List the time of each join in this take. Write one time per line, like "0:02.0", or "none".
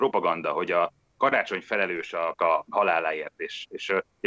0:02.4